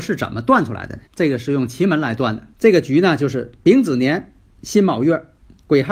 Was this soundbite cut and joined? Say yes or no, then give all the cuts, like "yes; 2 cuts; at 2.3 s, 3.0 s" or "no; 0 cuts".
yes; 2 cuts; at 1.1 s, 2.5 s